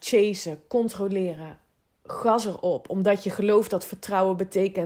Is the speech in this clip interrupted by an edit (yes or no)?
no